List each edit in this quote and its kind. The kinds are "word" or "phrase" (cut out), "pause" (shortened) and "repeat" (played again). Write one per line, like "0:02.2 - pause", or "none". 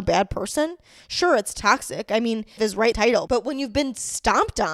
0:02.6 - word
0:02.9 - phrase